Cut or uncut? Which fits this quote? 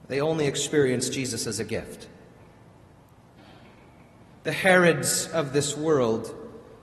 uncut